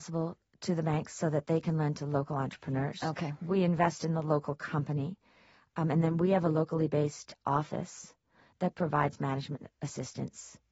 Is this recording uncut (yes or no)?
yes